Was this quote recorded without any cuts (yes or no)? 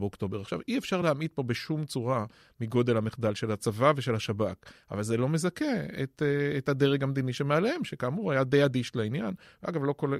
yes